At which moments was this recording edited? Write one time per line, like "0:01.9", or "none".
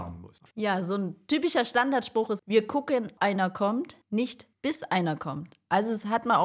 0:02.4
0:03.2